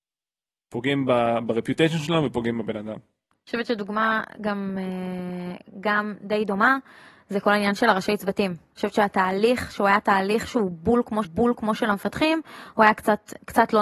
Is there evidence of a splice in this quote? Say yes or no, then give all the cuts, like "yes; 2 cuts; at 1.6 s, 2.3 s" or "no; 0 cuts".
yes; 1 cut; at 11.2 s